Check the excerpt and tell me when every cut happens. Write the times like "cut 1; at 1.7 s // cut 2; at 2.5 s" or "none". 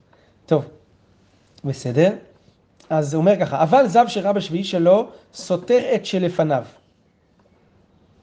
none